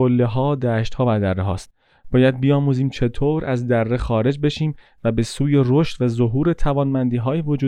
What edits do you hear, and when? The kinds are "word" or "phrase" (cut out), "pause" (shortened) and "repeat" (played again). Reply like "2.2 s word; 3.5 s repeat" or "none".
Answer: none

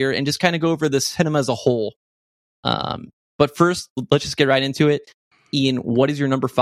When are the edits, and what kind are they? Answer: none

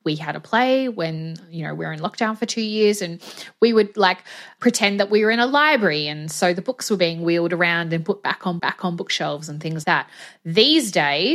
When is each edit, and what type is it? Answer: 8.6 s repeat; 9.8 s word

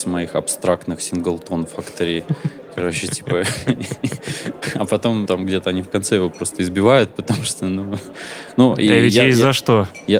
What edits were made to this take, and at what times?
5.3 s word

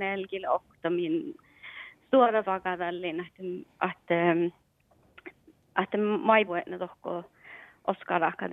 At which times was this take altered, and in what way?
2.4 s word; 6.5 s word

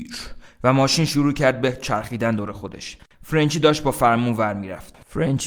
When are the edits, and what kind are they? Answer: none

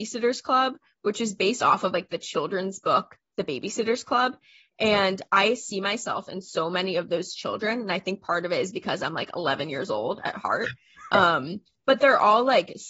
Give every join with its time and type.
none

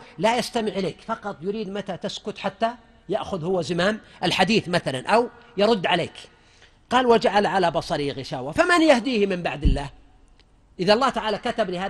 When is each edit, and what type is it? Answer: none

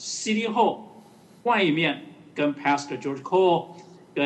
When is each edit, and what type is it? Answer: none

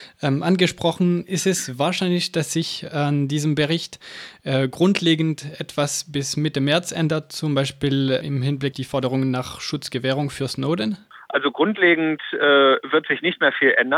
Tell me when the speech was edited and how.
8.2 s word; 8.7 s word

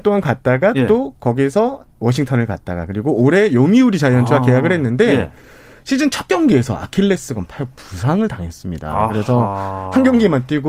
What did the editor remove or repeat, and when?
none

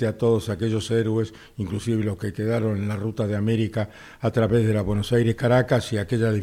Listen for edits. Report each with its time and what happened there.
none

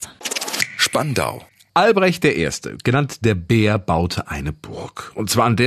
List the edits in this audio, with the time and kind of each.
none

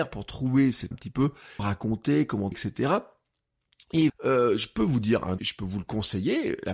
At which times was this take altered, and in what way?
0.9 s word; 1.6 s word; 2.5 s word; 4.1 s word; 5.4 s word

